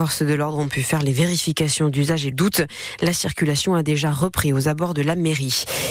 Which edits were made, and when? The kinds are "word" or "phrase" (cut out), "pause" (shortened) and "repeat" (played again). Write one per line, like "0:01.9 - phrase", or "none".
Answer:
0:02.3 - phrase